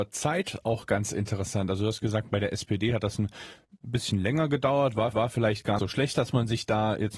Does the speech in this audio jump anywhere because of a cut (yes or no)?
yes